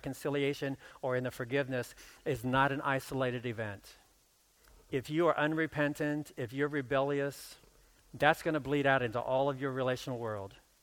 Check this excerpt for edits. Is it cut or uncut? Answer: cut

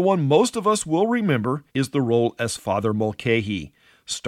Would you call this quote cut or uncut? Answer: cut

